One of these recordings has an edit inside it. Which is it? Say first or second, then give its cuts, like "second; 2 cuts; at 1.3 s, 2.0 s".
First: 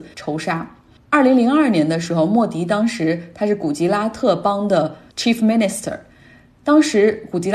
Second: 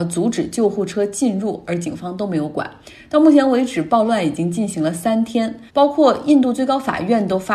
second; 1 cut; at 5.7 s